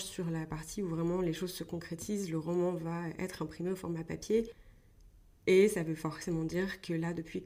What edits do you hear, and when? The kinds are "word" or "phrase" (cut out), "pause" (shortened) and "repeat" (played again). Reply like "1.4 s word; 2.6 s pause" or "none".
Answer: none